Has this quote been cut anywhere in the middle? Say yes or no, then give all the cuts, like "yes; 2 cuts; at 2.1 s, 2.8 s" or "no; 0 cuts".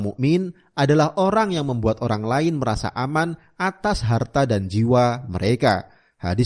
no; 0 cuts